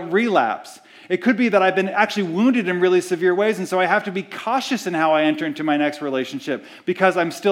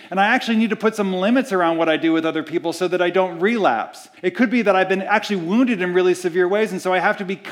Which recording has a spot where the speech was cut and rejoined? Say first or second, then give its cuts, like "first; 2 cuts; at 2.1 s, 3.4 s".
second; 1 cut; at 4.2 s